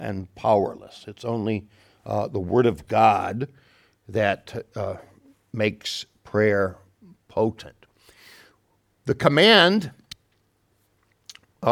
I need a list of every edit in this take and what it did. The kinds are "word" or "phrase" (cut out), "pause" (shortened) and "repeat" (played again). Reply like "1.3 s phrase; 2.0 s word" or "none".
none